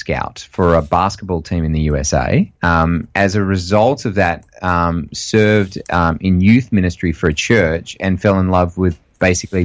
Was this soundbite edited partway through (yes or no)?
yes